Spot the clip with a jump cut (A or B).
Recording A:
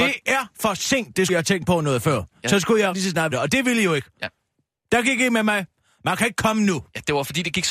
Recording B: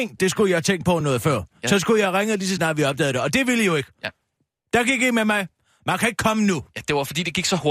A